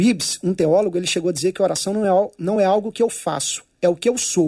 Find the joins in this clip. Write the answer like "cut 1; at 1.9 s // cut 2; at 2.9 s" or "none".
none